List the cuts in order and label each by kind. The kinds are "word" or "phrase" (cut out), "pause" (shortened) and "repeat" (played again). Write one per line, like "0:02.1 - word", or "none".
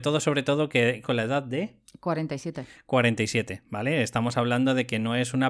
0:01.0 - word